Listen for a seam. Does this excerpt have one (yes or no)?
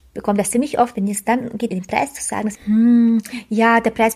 yes